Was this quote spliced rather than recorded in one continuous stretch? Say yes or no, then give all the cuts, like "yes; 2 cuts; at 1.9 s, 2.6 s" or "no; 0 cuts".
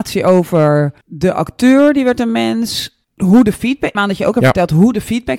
yes; 3 cuts; at 1.0 s, 3.0 s, 3.9 s